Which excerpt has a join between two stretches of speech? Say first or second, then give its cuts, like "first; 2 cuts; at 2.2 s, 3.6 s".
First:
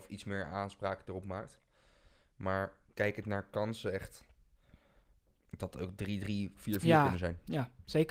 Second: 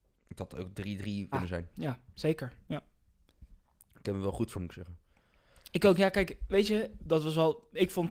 second; 3 cuts; at 1.3 s, 4.5 s, 7.0 s